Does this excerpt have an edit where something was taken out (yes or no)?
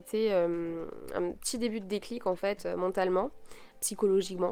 no